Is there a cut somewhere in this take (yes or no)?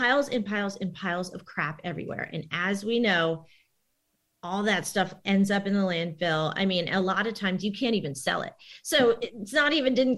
no